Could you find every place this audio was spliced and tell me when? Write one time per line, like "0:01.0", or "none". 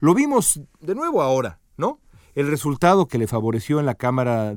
0:01.7